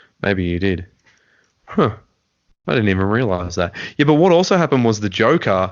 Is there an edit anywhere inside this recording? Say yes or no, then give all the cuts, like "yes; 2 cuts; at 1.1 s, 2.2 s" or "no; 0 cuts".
no; 0 cuts